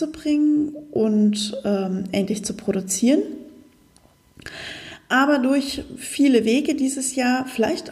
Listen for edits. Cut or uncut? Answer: uncut